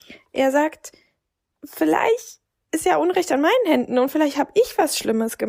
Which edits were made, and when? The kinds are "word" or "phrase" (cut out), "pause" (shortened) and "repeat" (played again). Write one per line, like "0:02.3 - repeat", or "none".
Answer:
none

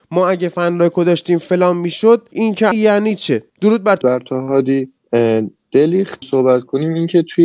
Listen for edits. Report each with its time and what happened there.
0:02.3 - word
0:02.7 - phrase
0:03.5 - pause
0:04.0 - phrase
0:06.2 - phrase

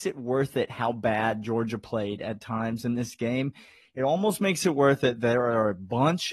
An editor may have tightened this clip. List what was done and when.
none

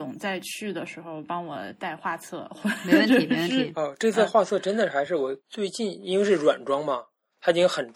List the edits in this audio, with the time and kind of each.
0:05.4 - pause

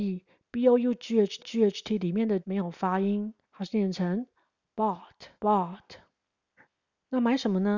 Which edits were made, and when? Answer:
0:01.4 - repeat
0:02.4 - phrase
0:03.4 - pause
0:05.4 - pause

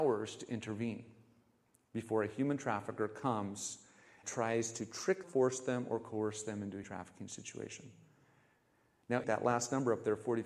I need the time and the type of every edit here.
0:04.2 - word
0:05.2 - word
0:06.8 - word
0:09.2 - word

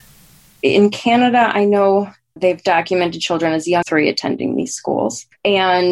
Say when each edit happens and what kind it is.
0:02.4 - word
0:03.8 - word

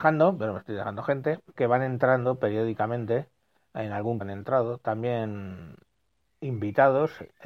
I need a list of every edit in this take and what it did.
0:01.6 - word
0:04.2 - word

